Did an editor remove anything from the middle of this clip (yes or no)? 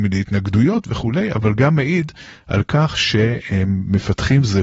no